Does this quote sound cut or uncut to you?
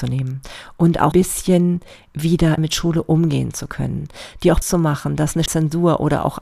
cut